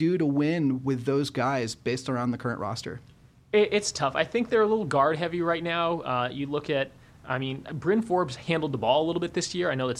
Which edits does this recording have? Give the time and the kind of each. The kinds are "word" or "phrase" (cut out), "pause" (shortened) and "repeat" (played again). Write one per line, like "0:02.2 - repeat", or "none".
none